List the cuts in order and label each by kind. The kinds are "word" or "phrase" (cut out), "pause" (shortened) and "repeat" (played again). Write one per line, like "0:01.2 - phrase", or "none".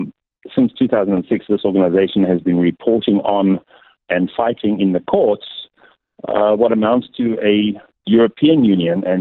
none